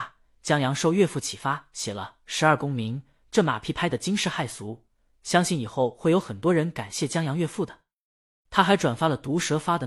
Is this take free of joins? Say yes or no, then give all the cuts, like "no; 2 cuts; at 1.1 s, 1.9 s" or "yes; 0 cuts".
yes; 0 cuts